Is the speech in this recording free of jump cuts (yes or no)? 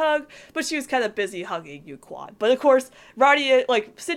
yes